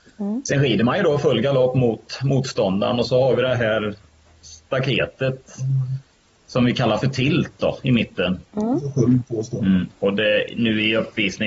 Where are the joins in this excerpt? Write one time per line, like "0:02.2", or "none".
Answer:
none